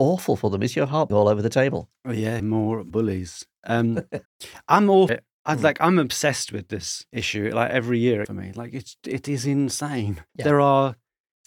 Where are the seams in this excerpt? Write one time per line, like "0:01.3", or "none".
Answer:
0:01.1
0:02.4
0:02.9
0:04.3
0:05.1
0:08.2
0:10.3